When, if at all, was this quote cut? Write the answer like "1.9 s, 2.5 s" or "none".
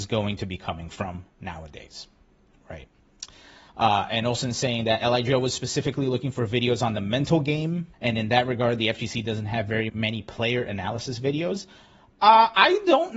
7.9 s, 9.9 s